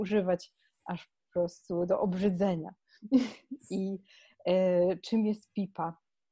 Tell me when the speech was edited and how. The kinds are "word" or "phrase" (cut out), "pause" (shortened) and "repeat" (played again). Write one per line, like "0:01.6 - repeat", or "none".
none